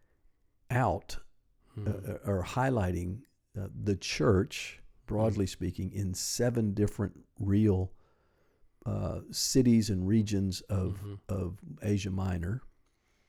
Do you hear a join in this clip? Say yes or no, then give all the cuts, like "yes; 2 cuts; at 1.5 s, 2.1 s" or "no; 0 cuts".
no; 0 cuts